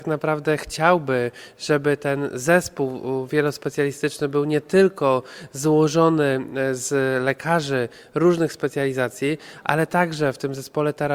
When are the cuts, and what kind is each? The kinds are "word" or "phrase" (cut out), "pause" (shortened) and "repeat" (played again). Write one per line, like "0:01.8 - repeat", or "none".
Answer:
none